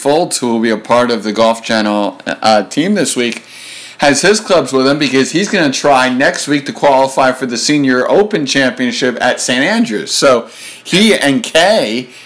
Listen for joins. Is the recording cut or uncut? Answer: uncut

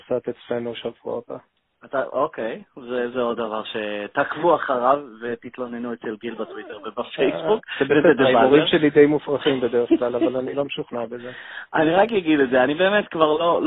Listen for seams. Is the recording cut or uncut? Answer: uncut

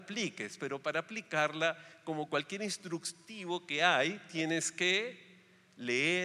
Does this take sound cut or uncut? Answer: uncut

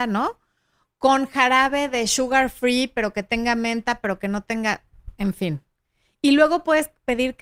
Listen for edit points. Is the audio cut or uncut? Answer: uncut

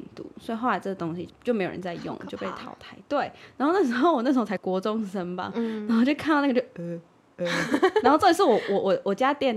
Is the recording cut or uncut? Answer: uncut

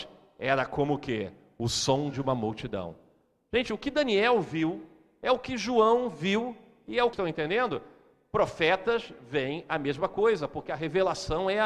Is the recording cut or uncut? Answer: cut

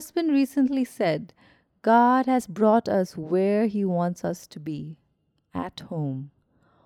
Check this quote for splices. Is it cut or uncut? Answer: uncut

